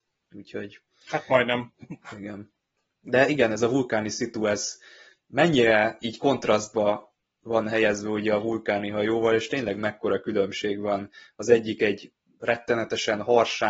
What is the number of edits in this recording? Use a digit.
0